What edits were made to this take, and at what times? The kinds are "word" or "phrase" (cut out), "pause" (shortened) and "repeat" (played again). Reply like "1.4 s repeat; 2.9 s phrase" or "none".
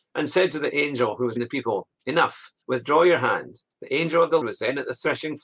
1.4 s word; 2.6 s pause; 3.7 s pause; 4.4 s word

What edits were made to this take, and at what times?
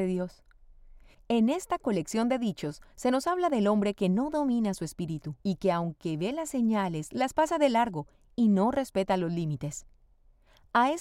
5.4 s pause

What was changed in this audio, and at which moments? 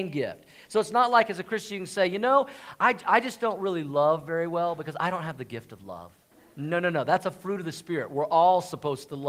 6.3 s pause

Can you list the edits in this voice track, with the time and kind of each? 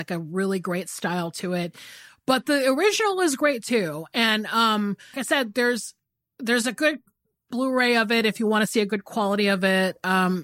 5.1 s word; 7.5 s phrase

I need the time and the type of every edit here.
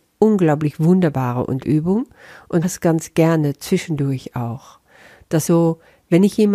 1.6 s word; 2.6 s word; 5.5 s word

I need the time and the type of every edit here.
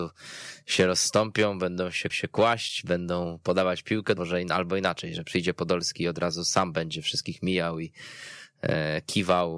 2.1 s repeat; 4.2 s phrase

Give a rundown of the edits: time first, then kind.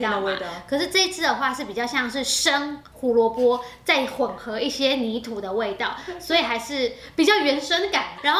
2.9 s pause

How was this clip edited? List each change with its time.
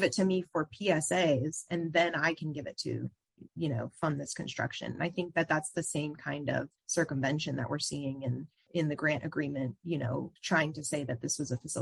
6.8 s pause; 8.7 s word; 10.4 s pause

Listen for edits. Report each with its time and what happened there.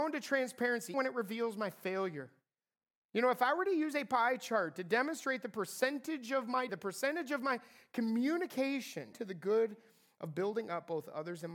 0.9 s word; 2.7 s pause; 6.7 s word; 9.1 s phrase

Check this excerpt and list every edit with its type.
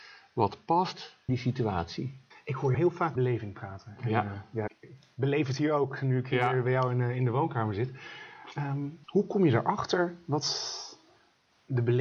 1.3 s word; 2.3 s pause; 2.7 s phrase; 3.2 s word; 4.7 s word; 9.0 s pause

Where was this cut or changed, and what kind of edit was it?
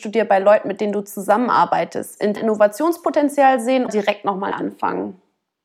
2.4 s word; 3.9 s word; 4.5 s word

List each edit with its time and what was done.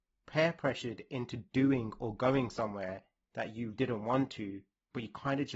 3.7 s word

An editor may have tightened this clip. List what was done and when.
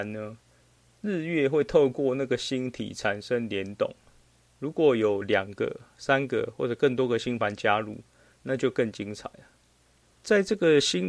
none

